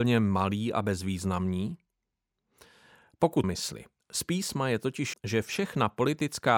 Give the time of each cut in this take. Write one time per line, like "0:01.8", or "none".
0:03.4
0:04.0
0:05.1